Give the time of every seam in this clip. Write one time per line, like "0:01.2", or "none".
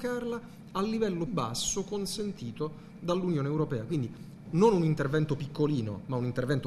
0:01.3
0:04.5